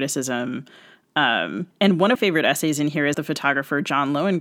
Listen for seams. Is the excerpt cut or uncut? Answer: cut